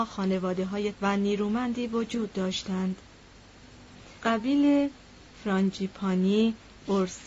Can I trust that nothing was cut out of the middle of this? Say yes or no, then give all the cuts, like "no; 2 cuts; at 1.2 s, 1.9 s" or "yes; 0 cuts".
no; 2 cuts; at 0.9 s, 4.2 s